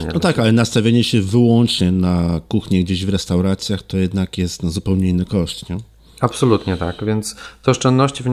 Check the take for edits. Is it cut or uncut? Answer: uncut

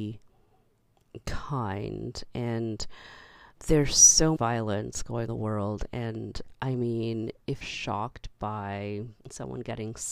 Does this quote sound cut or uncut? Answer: cut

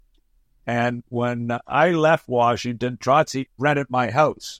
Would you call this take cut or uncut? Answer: cut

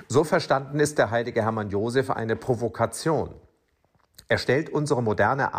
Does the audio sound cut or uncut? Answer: uncut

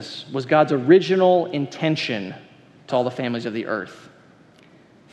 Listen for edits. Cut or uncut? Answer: cut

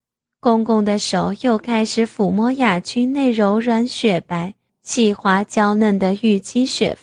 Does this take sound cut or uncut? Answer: cut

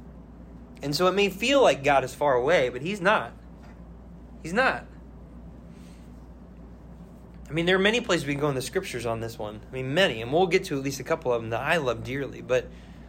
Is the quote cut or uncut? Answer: uncut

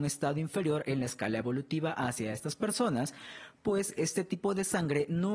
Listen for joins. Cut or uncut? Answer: uncut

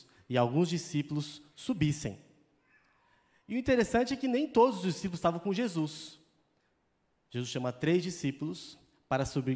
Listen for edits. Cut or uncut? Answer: uncut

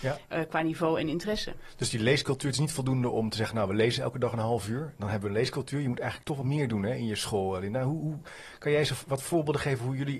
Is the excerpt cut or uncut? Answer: cut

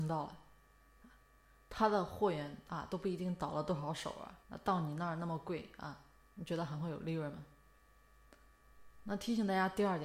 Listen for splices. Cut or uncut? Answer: cut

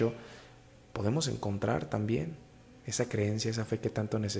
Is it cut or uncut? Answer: uncut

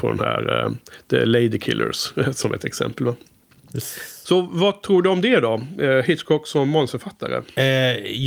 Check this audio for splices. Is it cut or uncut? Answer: uncut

